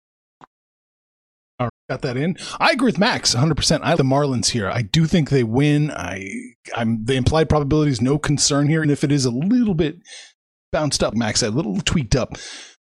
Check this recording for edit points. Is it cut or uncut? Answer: cut